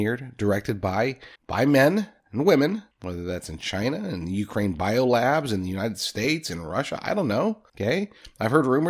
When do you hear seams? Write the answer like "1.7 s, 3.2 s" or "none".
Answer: 1.3 s, 2.2 s, 2.9 s, 7.7 s